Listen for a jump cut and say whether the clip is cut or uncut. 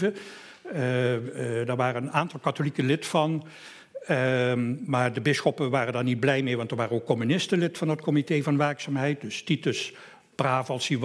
uncut